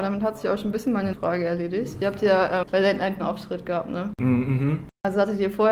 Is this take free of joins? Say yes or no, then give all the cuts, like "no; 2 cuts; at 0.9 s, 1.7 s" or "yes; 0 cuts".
no; 3 cuts; at 1.1 s, 2.6 s, 3.2 s